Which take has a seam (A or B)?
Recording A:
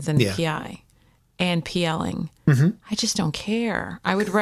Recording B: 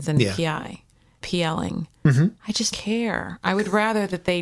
B